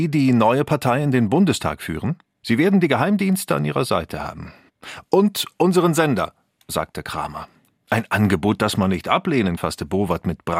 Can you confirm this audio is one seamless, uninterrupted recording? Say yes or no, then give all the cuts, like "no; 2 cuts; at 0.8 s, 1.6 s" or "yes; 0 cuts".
no; 1 cut; at 9.6 s